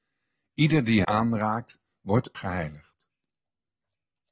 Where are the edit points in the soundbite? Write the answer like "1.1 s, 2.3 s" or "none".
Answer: 1.0 s, 2.3 s